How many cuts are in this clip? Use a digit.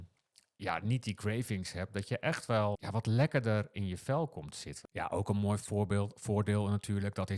1